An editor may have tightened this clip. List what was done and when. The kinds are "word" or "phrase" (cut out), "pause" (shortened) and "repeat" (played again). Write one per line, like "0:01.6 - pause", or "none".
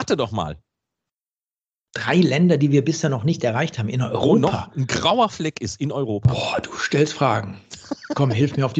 none